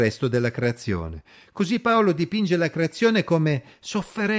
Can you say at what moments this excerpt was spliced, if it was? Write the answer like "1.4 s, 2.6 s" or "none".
none